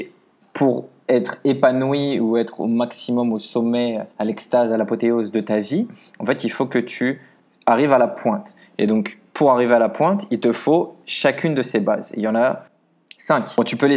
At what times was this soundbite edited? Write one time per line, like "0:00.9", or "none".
0:04.1